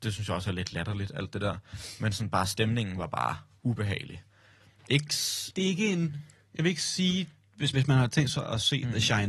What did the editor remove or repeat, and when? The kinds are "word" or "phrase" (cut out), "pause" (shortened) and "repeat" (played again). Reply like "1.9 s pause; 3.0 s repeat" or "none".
7.7 s word